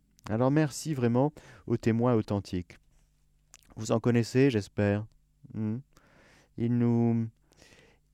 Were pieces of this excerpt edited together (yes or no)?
no